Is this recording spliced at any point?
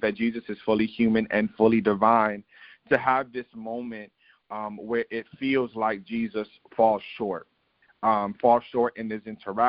no; 0 cuts

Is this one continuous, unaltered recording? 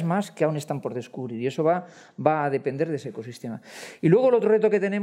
yes; 0 cuts

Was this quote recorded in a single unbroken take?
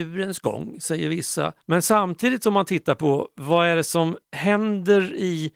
no; 2 cuts; at 1.6 s, 4.2 s

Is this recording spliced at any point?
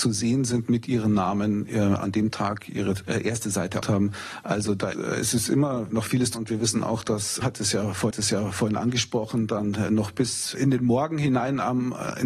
yes; 5 cuts; at 3.8 s, 4.9 s, 6.3 s, 7.4 s, 8.1 s

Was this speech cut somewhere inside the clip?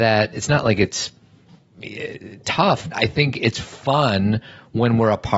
yes; 1 cut; at 2.9 s

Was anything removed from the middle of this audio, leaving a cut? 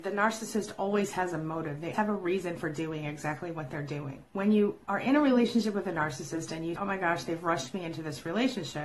yes; 2 cuts; at 1.9 s, 6.8 s

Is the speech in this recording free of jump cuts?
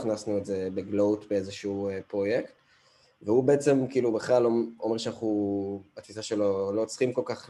yes; 0 cuts

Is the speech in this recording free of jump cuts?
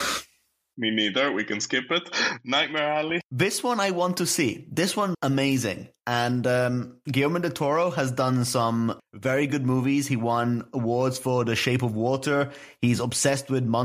no; 2 cuts; at 3.2 s, 5.1 s

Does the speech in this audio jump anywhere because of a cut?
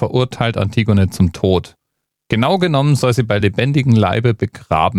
no; 0 cuts

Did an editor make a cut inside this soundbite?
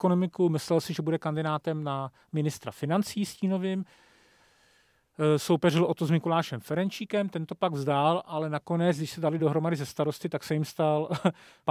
no; 0 cuts

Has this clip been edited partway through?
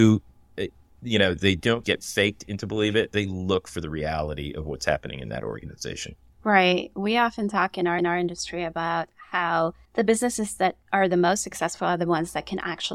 yes; 4 cuts; at 1.8 s, 8.0 s, 9.9 s, 10.8 s

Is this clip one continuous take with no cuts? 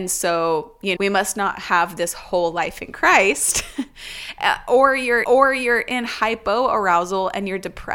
no; 2 cuts; at 1.0 s, 5.2 s

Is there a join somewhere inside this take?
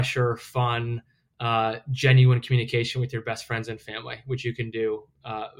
no; 0 cuts

